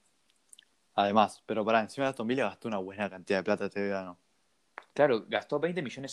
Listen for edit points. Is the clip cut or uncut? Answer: uncut